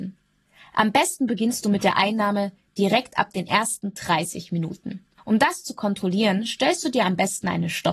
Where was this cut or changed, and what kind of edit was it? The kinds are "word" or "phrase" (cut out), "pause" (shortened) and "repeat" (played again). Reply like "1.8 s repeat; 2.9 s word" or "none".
5.2 s pause